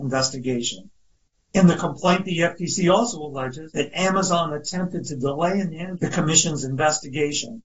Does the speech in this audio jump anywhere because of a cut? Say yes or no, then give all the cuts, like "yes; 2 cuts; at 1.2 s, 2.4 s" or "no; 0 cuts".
no; 0 cuts